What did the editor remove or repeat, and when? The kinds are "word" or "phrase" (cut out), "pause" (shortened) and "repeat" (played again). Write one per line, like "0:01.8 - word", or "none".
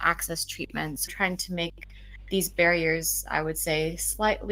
0:01.1 - word